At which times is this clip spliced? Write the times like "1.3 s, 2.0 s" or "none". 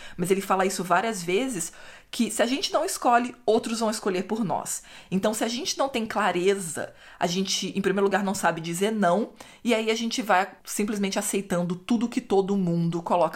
10.6 s